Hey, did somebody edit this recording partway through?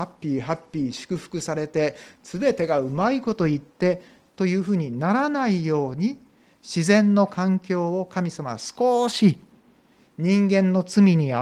no; 0 cuts

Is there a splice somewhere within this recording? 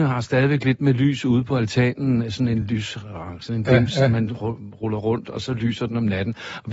no; 0 cuts

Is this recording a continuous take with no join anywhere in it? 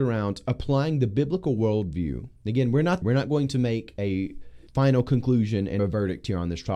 no; 4 cuts; at 2.4 s, 3.0 s, 4.7 s, 5.8 s

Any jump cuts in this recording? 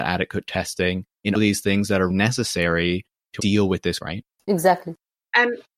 yes; 4 cuts; at 1.3 s, 2.1 s, 3.4 s, 4.0 s

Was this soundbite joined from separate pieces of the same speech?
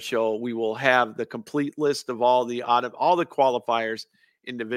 no; 0 cuts

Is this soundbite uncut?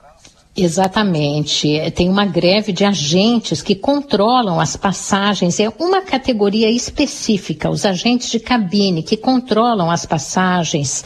yes; 0 cuts

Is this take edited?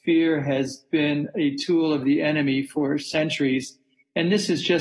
no; 0 cuts

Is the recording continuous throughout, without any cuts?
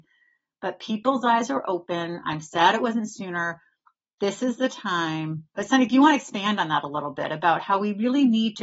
yes; 0 cuts

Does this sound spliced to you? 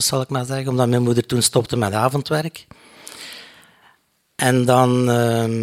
no; 0 cuts

